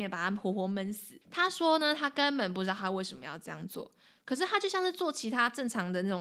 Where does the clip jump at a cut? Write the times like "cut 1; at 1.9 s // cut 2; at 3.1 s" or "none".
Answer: cut 1; at 1.2 s